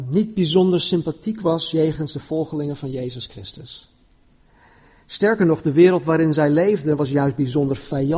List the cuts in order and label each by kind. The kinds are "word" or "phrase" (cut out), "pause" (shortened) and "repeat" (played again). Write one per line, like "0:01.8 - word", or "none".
none